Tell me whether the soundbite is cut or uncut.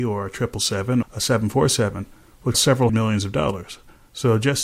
cut